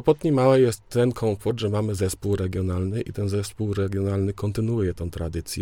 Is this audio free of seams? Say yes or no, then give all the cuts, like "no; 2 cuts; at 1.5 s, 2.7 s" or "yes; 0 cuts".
yes; 0 cuts